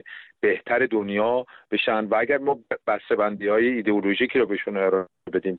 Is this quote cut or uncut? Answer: uncut